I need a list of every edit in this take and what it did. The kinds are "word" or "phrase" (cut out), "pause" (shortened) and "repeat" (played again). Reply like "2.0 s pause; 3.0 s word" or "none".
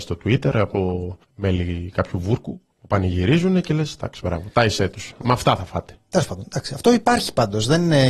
1.2 s pause; 2.7 s pause; 5.2 s word